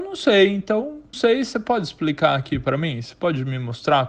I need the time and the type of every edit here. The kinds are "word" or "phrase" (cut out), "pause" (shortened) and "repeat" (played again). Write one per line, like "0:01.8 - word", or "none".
0:01.1 - phrase